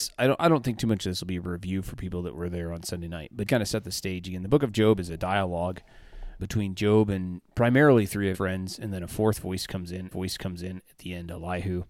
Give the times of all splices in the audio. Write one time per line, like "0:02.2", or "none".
0:03.5
0:06.4
0:07.5
0:08.3
0:10.1

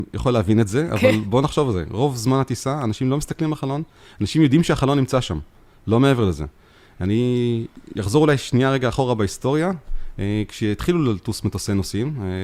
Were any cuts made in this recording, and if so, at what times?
none

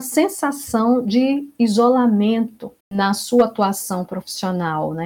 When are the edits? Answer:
0:02.8

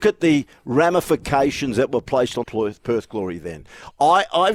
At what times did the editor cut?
0:02.4

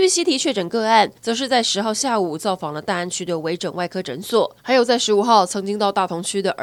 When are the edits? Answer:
0:01.2
0:04.6

